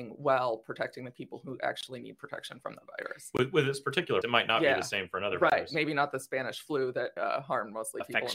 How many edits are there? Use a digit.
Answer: 2